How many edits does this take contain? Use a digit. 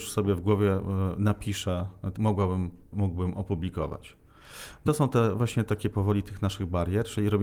3